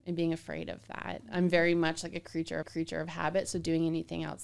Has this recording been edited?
yes; 1 cut; at 2.6 s

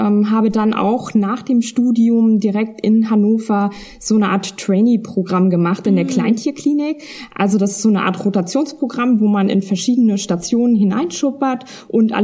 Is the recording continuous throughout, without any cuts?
yes; 0 cuts

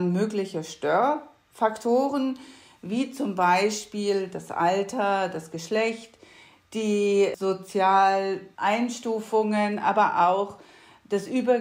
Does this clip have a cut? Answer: no; 0 cuts

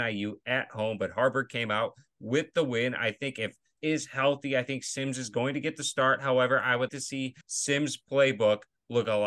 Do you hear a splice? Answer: yes; 3 cuts; at 3.8 s, 6.9 s, 7.4 s

